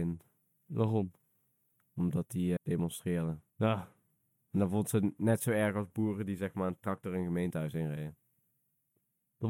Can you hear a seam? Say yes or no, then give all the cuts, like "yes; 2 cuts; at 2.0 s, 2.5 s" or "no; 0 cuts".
yes; 2 cuts; at 2.6 s, 3.5 s